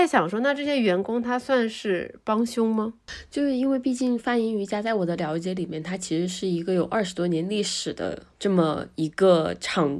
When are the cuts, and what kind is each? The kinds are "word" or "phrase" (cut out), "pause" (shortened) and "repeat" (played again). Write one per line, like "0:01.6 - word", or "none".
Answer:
0:08.3 - pause